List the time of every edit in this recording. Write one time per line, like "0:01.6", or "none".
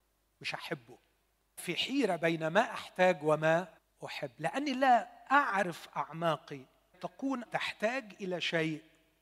0:01.6
0:03.8
0:06.9
0:07.5